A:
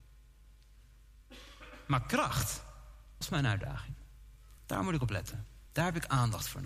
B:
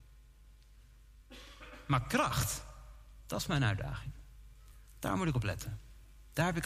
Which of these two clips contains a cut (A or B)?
A